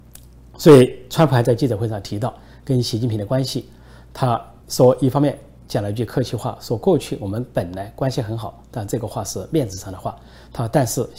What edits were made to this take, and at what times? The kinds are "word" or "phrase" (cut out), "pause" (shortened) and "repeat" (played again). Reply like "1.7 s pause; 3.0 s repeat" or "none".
4.6 s pause

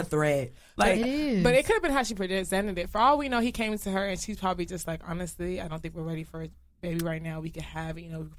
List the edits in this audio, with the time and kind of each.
none

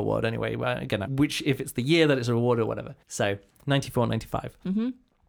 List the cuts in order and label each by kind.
1.1 s phrase; 3.0 s pause

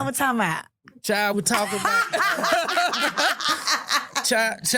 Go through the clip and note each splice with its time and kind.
1.3 s word

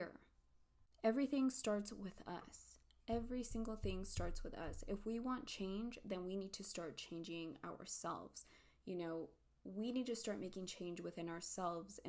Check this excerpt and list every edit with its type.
none

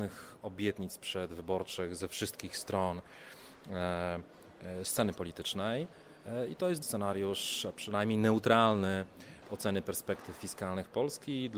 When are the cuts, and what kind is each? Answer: 6.8 s word; 9.4 s word

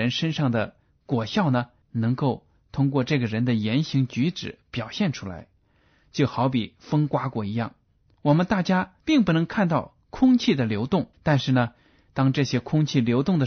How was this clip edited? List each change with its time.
1.8 s pause; 9.0 s pause; 11.1 s pause

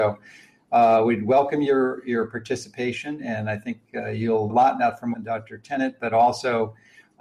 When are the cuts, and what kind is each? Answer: 4.5 s phrase; 5.1 s phrase

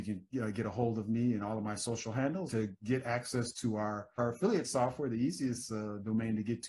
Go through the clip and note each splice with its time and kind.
2.5 s word; 4.2 s word

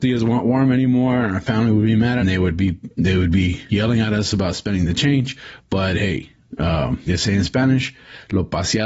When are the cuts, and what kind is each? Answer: 2.2 s phrase; 2.9 s pause; 3.7 s word; 7.1 s word

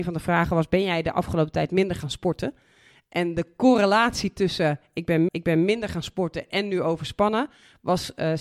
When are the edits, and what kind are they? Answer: 5.3 s repeat

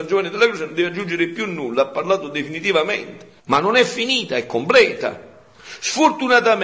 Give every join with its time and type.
3.4 s pause

